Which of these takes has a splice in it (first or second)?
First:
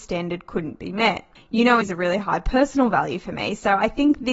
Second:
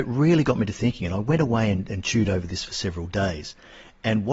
first